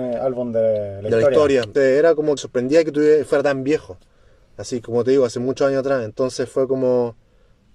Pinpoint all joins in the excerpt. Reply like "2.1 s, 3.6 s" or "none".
1.7 s, 2.4 s